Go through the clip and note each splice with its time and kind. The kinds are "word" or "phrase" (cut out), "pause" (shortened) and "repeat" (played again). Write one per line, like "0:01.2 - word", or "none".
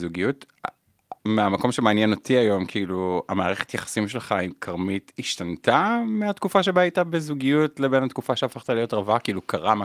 0:01.2 - pause